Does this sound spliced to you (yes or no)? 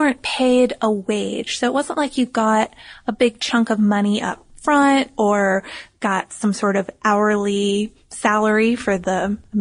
no